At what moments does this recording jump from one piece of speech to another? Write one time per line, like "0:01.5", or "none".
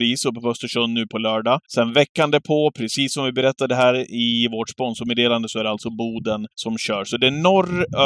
0:01.6
0:06.5